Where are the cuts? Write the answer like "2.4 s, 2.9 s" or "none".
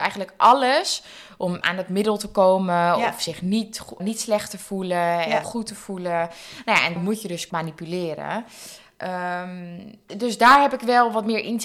1.6 s, 4.0 s, 5.4 s, 7.0 s, 7.5 s, 10.1 s

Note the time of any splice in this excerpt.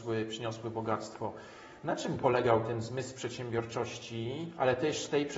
none

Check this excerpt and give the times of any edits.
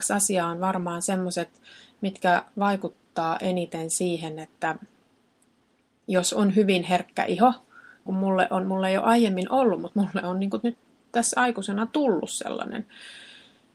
8.1 s

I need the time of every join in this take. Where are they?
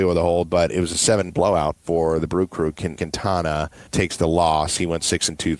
1.3 s, 3.0 s, 3.9 s

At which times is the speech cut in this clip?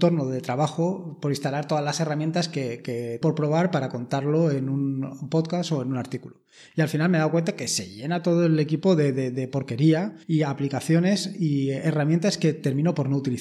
3.2 s, 10.2 s

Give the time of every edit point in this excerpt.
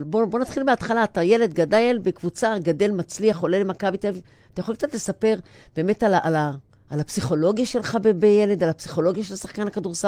none

